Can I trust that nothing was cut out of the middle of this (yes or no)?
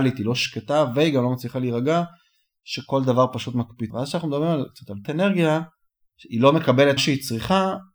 no